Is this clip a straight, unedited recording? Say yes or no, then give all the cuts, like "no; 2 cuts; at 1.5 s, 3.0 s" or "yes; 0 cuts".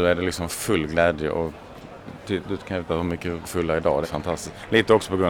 no; 3 cuts; at 2.9 s, 3.4 s, 4.0 s